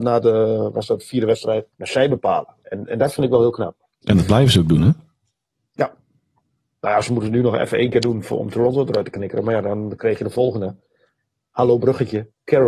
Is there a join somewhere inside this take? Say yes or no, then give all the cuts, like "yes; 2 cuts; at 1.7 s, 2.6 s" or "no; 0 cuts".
yes; 2 cuts; at 1.7 s, 3.9 s